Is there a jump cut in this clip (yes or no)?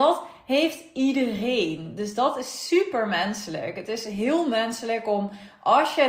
no